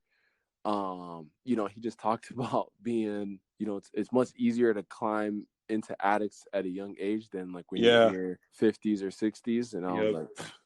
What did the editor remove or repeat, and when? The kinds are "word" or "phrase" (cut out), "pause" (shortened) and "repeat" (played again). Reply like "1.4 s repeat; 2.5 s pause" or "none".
3.5 s pause; 8.5 s pause